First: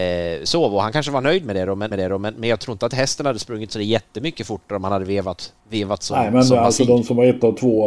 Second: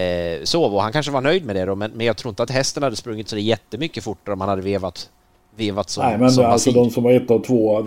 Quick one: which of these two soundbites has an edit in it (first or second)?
first